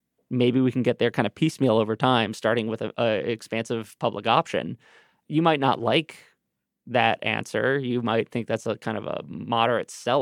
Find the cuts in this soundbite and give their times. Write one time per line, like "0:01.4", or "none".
none